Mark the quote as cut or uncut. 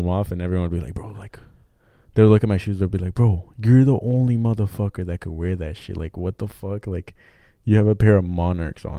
uncut